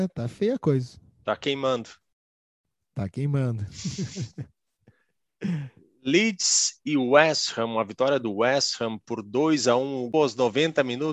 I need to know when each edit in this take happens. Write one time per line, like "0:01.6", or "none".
0:10.1